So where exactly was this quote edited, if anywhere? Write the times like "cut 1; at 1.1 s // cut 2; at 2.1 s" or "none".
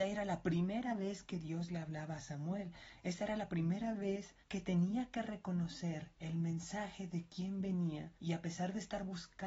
cut 1; at 4.4 s // cut 2; at 8.2 s